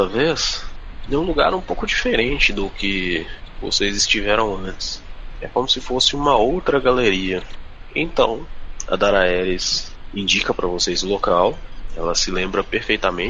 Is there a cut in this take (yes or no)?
no